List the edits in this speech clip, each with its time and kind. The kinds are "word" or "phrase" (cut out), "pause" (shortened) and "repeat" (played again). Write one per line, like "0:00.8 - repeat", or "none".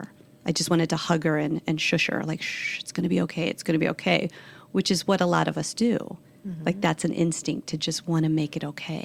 none